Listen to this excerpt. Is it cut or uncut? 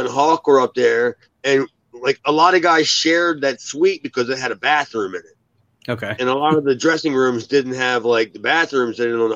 uncut